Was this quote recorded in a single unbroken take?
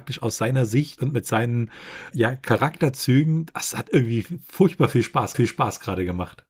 no; 2 cuts; at 2.1 s, 5.3 s

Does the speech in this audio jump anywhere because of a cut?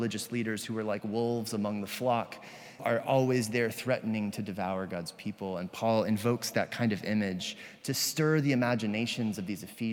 yes; 1 cut; at 2.8 s

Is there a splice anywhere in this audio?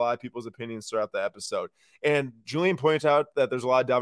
no; 0 cuts

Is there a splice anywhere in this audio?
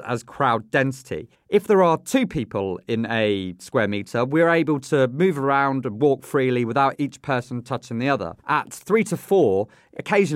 yes; 2 cuts; at 1.3 s, 8.4 s

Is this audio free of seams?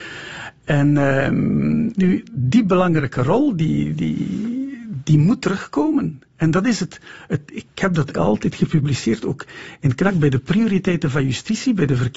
no; 2 cuts; at 2.0 s, 8.1 s

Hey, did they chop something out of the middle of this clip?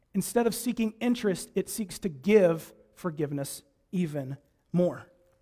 no; 0 cuts

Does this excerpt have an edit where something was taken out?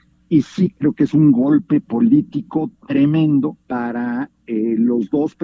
yes; 1 cut; at 3.6 s

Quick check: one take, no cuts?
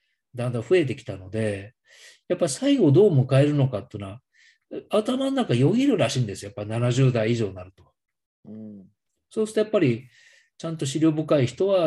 yes; 0 cuts

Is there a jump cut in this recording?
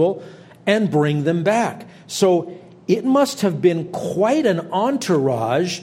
no; 0 cuts

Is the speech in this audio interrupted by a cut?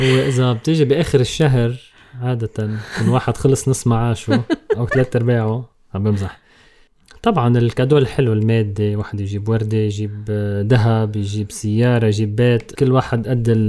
yes; 1 cut; at 12.7 s

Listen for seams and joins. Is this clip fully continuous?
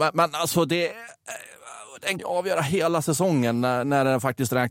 no; 1 cut; at 2.2 s

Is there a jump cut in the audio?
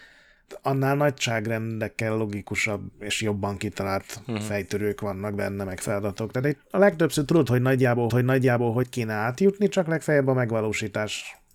yes; 2 cuts; at 2.9 s, 8.1 s

